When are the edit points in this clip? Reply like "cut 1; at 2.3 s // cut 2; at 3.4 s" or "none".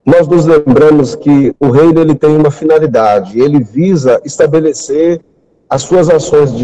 none

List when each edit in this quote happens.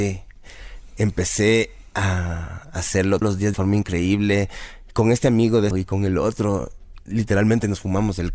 cut 1; at 3.2 s // cut 2; at 3.5 s // cut 3; at 5.7 s

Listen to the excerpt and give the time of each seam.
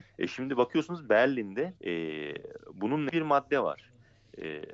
cut 1; at 1.8 s // cut 2; at 3.1 s

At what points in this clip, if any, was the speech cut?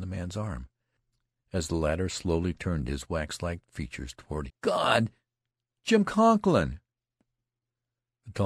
cut 1; at 4.5 s

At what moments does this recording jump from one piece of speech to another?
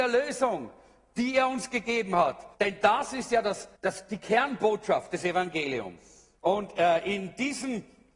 cut 1; at 2.5 s // cut 2; at 3.8 s // cut 3; at 6.4 s

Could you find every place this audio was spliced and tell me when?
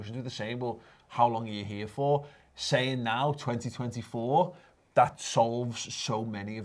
none

